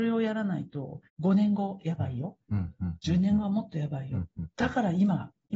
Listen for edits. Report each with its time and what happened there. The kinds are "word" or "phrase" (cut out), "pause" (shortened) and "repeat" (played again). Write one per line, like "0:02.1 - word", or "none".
0:01.1 - pause